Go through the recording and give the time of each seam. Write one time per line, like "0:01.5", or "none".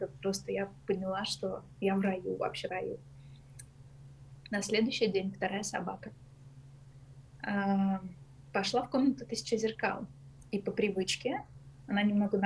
0:02.7